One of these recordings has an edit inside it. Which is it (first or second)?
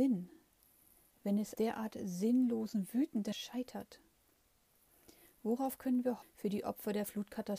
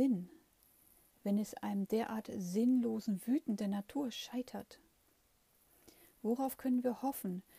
first